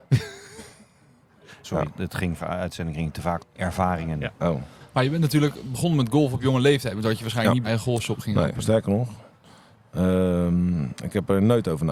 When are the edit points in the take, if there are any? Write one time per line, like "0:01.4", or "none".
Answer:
0:01.6
0:02.4
0:03.4
0:07.6